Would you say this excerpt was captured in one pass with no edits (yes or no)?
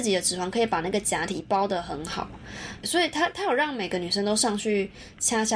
no